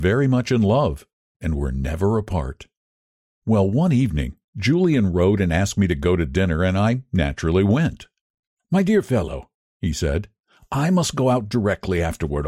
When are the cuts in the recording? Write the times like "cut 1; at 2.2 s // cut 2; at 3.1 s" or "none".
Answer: none